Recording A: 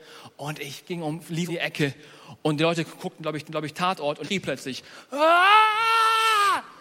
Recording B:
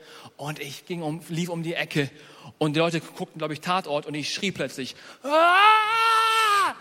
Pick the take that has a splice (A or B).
A